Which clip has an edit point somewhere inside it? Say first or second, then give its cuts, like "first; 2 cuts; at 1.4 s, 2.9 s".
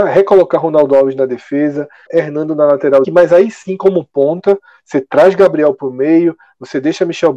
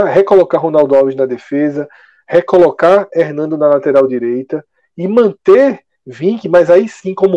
first; 2 cuts; at 2.1 s, 3.0 s